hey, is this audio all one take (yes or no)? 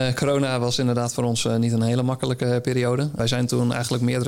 yes